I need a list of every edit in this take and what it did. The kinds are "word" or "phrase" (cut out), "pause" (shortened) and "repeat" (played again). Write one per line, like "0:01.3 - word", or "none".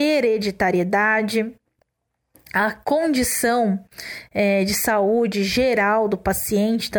none